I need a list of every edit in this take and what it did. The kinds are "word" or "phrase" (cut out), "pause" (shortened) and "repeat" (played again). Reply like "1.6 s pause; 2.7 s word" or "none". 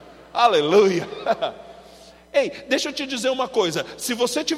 none

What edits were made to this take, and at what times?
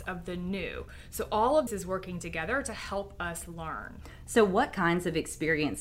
1.7 s word

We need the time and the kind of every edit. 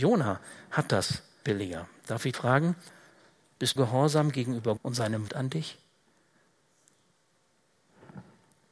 1.4 s word; 2.3 s word; 3.8 s word; 4.8 s word; 5.3 s word

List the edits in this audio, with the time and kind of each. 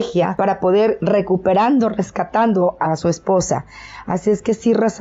1.0 s word; 2.8 s word

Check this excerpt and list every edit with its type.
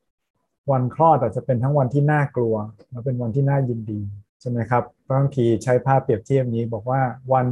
4.3 s pause

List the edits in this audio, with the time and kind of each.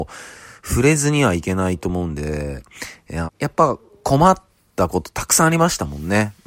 3.3 s phrase

